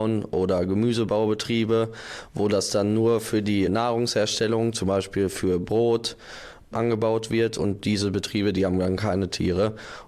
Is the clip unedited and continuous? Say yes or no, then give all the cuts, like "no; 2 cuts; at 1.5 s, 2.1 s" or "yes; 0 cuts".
yes; 0 cuts